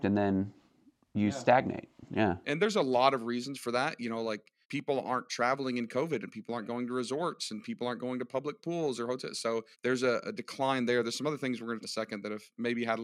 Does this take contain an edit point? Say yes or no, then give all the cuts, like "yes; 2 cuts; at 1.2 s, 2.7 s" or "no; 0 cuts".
yes; 4 cuts; at 4.6 s, 9.7 s, 10.2 s, 11.8 s